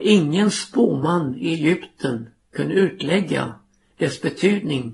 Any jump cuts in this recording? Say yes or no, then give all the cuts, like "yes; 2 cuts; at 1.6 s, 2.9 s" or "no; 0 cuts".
no; 0 cuts